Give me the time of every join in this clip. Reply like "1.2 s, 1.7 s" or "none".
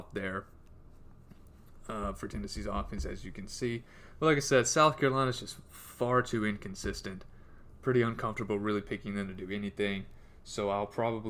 none